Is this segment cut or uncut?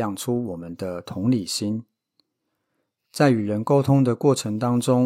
uncut